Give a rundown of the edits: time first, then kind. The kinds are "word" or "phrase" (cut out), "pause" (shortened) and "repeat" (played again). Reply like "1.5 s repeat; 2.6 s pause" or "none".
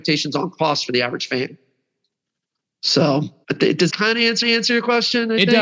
3.4 s pause; 3.9 s word; 4.4 s repeat